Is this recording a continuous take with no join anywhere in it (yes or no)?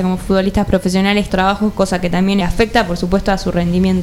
no